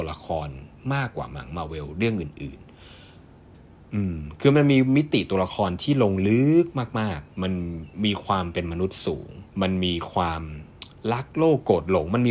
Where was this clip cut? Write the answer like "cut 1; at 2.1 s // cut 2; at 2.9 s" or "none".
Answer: cut 1; at 7.3 s // cut 2; at 9.5 s